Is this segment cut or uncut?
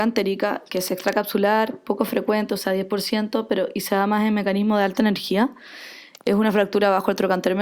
uncut